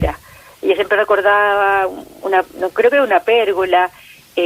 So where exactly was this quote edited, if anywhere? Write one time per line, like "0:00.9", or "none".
none